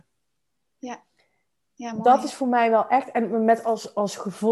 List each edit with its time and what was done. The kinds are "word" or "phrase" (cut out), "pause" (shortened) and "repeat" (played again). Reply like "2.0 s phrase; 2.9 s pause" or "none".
none